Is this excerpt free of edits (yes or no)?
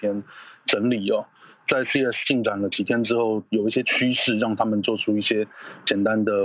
yes